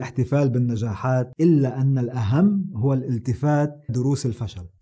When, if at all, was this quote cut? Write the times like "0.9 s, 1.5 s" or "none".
3.9 s